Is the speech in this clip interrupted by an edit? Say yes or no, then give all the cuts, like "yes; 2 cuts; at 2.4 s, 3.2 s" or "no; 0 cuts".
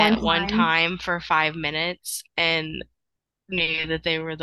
yes; 1 cut; at 3.2 s